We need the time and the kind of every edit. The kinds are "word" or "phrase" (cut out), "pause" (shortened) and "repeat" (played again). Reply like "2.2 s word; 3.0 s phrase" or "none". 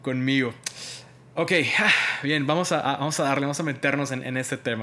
none